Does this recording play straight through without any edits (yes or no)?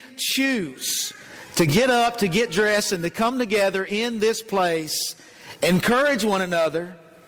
yes